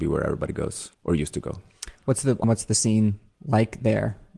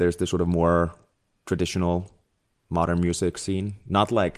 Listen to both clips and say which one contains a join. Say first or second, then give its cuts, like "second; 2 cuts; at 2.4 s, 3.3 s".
first; 2 cuts; at 0.9 s, 2.4 s